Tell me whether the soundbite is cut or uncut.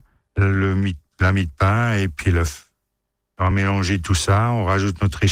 uncut